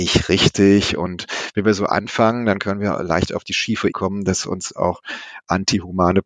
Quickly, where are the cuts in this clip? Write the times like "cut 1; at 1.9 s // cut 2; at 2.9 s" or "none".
cut 1; at 3.9 s

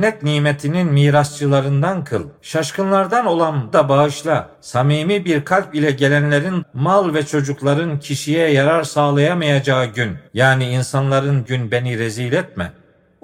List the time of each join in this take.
cut 1; at 2.4 s // cut 2; at 3.7 s // cut 3; at 4.5 s // cut 4; at 6.6 s // cut 5; at 10.3 s // cut 6; at 11.5 s

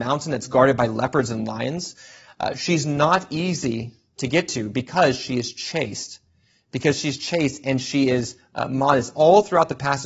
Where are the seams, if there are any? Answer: none

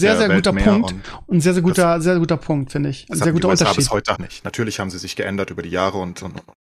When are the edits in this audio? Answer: cut 1; at 4.1 s

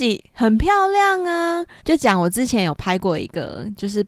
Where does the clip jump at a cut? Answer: cut 1; at 1.8 s

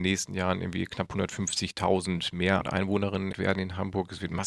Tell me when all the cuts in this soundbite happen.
cut 1; at 2.6 s // cut 2; at 3.3 s

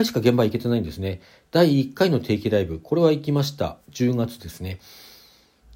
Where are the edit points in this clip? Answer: cut 1; at 3.8 s

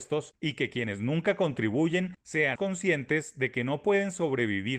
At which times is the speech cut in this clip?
cut 1; at 2.6 s

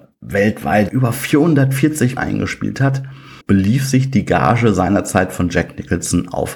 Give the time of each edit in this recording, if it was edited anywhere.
cut 1; at 2.2 s // cut 2; at 3.4 s

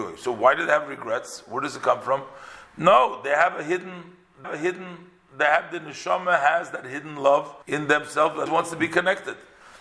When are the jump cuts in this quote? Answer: cut 1; at 4.4 s // cut 2; at 7.6 s // cut 3; at 8.5 s

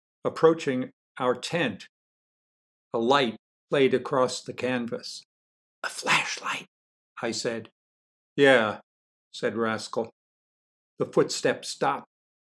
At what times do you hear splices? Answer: none

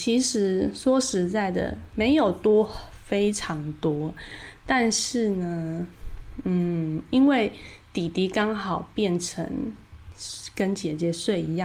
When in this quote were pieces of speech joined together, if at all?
none

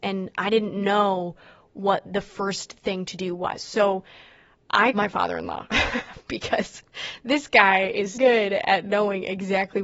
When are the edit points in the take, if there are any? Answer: cut 1; at 4.9 s // cut 2; at 8.1 s

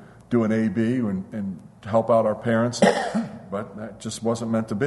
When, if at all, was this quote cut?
cut 1; at 1.8 s // cut 2; at 2.8 s

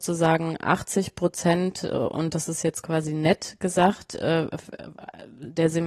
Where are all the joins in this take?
none

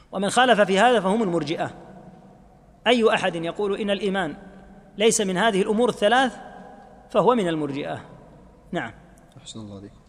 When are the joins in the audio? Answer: none

